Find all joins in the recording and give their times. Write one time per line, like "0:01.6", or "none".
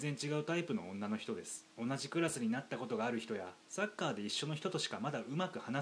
0:01.7
0:03.6